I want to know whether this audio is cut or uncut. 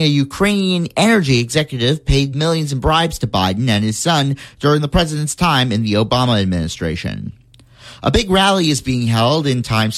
uncut